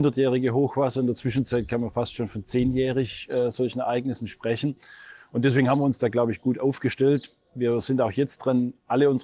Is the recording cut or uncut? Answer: uncut